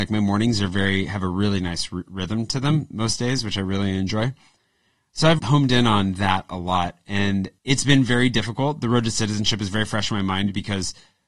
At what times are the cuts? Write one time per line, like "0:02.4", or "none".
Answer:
0:05.4
0:07.6